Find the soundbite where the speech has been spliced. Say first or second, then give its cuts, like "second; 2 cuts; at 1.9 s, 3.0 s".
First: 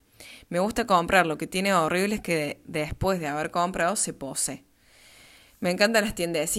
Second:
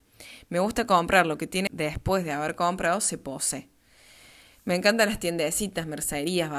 second; 1 cut; at 1.7 s